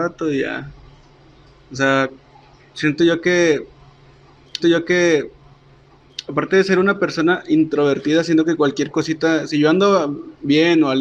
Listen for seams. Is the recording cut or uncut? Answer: cut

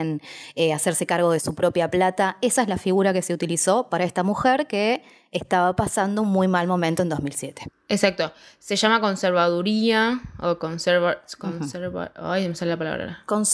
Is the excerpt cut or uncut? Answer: uncut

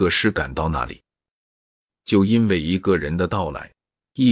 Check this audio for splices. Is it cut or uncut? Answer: uncut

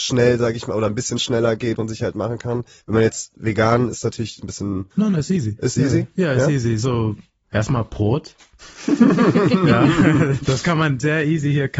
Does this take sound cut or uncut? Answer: cut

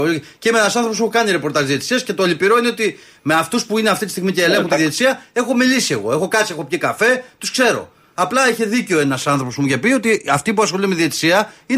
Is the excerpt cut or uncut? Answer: uncut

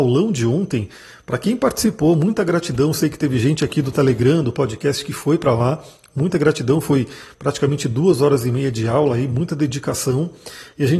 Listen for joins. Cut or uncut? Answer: uncut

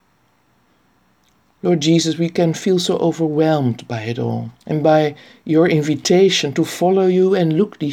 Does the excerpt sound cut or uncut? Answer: cut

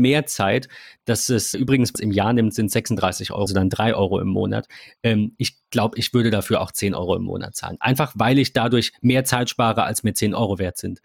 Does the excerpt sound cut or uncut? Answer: cut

